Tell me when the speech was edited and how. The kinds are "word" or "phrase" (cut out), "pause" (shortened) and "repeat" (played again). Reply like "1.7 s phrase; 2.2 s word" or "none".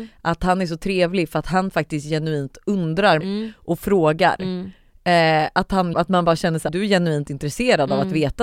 3.2 s phrase; 5.9 s word; 6.7 s word